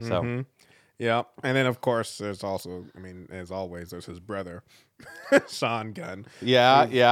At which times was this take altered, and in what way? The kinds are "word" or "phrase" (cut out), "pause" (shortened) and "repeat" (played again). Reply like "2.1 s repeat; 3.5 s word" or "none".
none